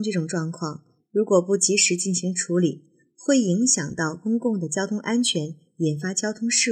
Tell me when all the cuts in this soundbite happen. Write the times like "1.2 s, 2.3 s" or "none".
none